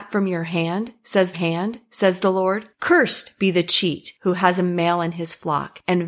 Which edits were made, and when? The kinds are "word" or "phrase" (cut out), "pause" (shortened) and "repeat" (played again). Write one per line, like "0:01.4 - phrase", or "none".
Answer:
0:01.3 - repeat

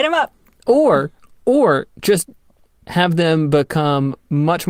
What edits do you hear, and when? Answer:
none

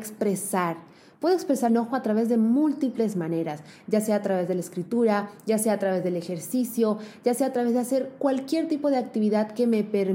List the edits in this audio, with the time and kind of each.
0:01.7 - word

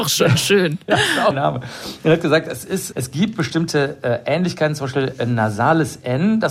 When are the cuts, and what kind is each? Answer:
0:01.3 - phrase
0:02.9 - word

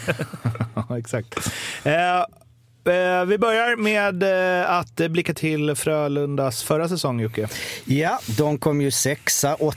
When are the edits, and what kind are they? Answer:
0:05.3 - word

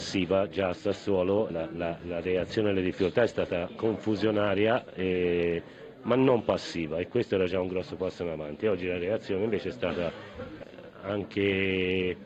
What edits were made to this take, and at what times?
0:01.5 - word

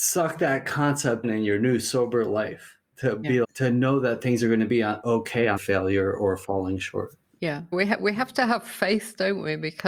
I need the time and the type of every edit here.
0:01.2 - word
0:03.4 - word
0:05.6 - phrase
0:07.7 - word

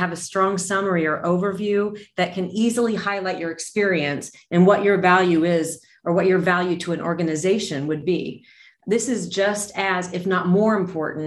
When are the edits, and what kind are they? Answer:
none

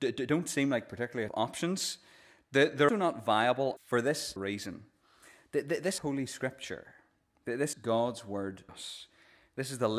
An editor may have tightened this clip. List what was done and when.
0:01.3 - word
0:02.9 - word
0:03.8 - word
0:04.4 - word
0:06.0 - word
0:07.7 - word
0:08.7 - word

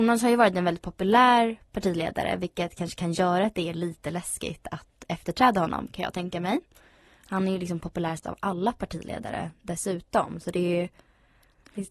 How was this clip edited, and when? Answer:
none

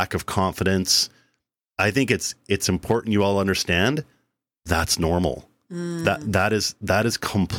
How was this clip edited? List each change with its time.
none

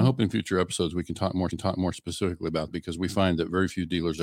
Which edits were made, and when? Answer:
0:01.5 - repeat
0:02.7 - word

